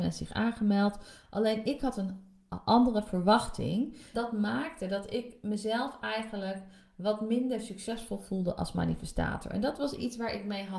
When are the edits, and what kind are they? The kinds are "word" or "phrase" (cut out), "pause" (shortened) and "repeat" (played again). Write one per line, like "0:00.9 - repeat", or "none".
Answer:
0:04.1 - word